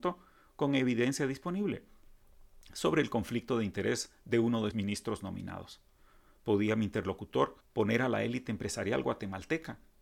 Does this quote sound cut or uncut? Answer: cut